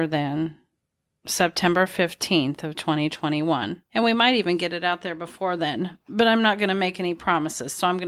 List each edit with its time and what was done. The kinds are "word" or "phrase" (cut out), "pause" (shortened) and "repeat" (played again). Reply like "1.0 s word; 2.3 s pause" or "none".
3.9 s pause